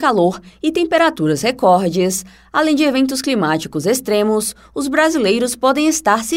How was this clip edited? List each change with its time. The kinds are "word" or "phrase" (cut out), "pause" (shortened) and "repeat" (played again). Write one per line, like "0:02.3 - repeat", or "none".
none